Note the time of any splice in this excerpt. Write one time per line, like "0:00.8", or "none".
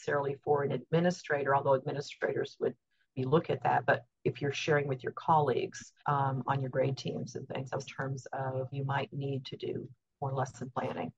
0:03.2
0:06.0
0:07.9
0:08.7